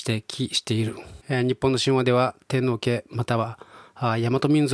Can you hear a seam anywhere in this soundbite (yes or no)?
yes